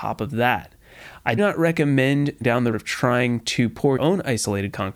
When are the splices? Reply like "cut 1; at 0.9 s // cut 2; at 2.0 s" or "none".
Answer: cut 1; at 1.4 s // cut 2; at 2.4 s // cut 3; at 2.7 s // cut 4; at 4.0 s